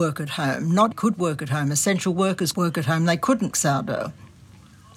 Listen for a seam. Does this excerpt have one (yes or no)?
yes